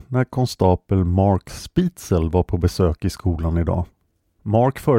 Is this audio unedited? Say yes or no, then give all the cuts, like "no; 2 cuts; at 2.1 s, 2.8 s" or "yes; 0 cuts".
yes; 0 cuts